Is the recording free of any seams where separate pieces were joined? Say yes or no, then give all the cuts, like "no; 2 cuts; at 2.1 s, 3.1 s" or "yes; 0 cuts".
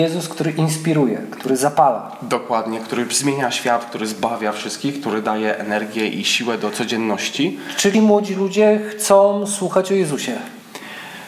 no; 1 cut; at 7.9 s